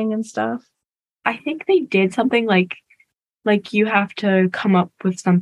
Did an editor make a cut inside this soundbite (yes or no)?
no